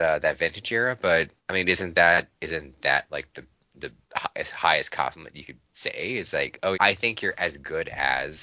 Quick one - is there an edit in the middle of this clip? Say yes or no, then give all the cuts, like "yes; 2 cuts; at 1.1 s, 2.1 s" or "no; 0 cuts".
yes; 5 cuts; at 1.4 s, 2.3 s, 4.0 s, 5.6 s, 6.7 s